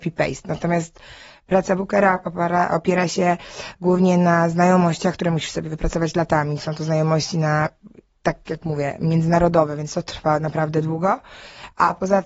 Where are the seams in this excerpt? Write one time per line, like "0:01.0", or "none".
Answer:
none